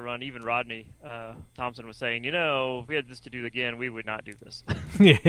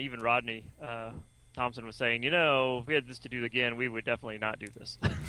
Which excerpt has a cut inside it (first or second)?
first